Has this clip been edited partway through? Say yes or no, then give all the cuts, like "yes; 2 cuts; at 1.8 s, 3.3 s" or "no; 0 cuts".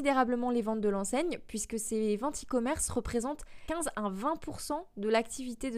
no; 0 cuts